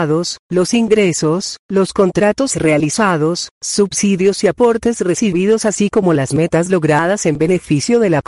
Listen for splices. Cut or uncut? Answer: uncut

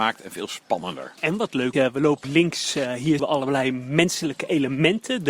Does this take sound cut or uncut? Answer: cut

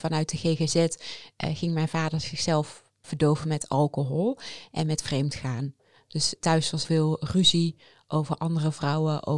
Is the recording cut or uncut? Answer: cut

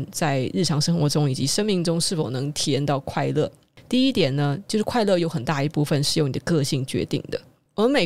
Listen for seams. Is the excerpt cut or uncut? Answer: uncut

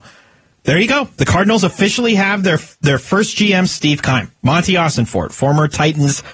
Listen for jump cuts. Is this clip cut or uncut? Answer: cut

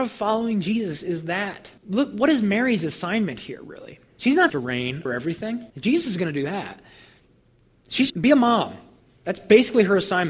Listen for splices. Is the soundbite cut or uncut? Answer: cut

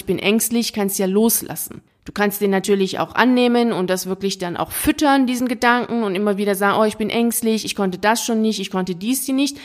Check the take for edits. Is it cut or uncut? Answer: uncut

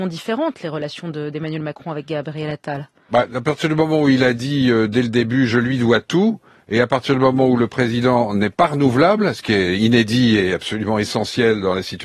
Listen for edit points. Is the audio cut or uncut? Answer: uncut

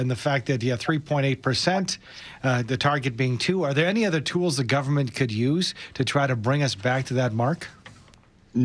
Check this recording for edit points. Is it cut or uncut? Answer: uncut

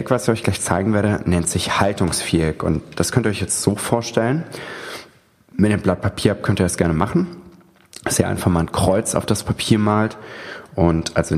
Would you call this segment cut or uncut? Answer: uncut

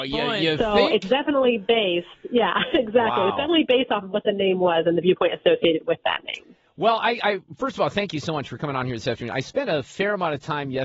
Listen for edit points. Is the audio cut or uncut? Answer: uncut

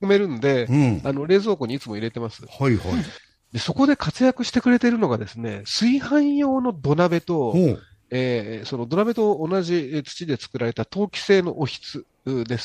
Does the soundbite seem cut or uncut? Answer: uncut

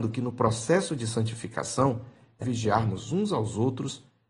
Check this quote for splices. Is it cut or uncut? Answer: cut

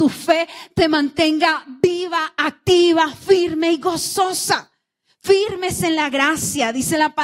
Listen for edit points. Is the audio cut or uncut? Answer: uncut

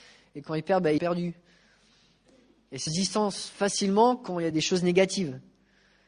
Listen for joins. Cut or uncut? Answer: cut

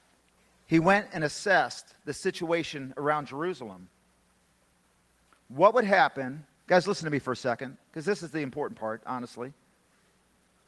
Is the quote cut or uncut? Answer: uncut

